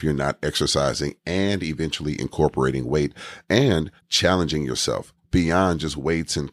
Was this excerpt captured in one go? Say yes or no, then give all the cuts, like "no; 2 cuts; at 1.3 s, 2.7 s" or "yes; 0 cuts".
no; 1 cut; at 4.0 s